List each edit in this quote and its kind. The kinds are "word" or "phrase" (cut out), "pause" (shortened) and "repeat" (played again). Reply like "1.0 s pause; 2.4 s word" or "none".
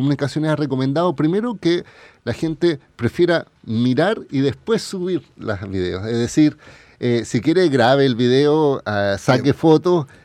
none